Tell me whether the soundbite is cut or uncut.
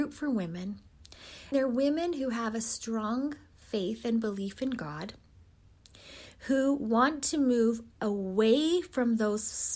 cut